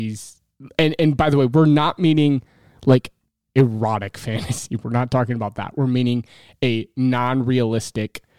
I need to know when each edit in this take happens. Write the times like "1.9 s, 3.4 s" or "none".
none